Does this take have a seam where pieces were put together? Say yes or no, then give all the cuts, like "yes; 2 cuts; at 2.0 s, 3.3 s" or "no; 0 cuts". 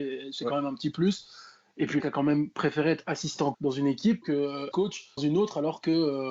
yes; 5 cuts; at 2.0 s, 3.5 s, 4.2 s, 4.7 s, 5.2 s